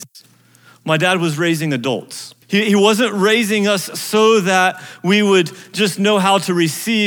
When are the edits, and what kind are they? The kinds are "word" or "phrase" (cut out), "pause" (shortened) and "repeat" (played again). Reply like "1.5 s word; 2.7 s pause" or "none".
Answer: 2.4 s pause